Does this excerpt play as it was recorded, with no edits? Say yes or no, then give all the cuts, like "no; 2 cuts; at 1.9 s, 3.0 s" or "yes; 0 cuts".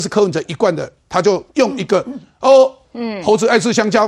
no; 2 cuts; at 1.5 s, 2.8 s